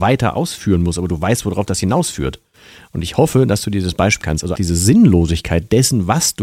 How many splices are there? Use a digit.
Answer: 2